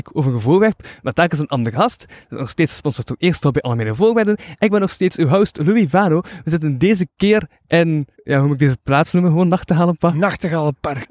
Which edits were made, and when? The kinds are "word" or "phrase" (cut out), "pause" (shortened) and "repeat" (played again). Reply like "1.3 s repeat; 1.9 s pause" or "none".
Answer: 8.1 s pause